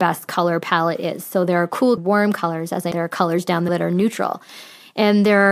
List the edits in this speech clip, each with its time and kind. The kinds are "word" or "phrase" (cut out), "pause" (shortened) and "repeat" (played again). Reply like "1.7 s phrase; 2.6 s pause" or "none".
2.0 s phrase; 2.9 s word; 3.7 s word